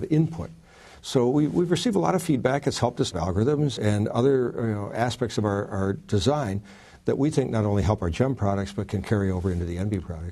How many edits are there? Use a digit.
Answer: 2